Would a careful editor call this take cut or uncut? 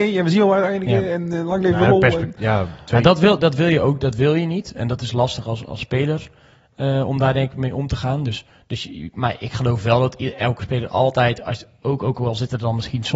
uncut